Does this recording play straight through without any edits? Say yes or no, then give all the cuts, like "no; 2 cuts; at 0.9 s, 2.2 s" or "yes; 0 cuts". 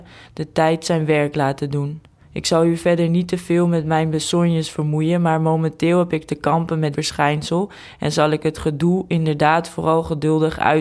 no; 2 cuts; at 2.2 s, 6.9 s